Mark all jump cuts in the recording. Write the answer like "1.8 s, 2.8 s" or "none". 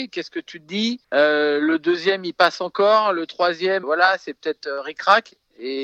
1.0 s, 3.8 s

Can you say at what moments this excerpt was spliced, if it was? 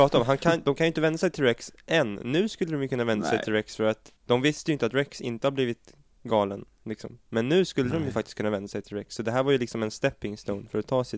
4.2 s

